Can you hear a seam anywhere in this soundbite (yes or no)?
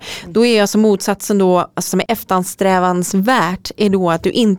yes